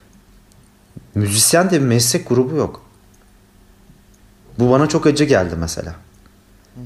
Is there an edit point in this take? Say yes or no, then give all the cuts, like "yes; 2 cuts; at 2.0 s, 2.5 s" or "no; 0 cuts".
no; 0 cuts